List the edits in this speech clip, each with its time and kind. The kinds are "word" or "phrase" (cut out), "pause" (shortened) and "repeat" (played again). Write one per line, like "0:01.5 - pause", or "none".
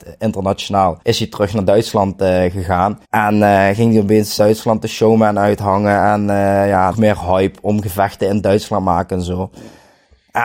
0:01.0 - pause
0:03.0 - pause
0:04.4 - word
0:06.9 - word